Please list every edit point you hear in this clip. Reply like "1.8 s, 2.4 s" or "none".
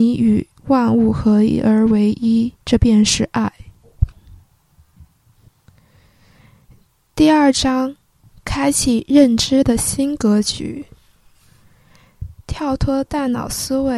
2.6 s